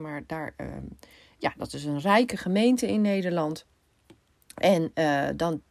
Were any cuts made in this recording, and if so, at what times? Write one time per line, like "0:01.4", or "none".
none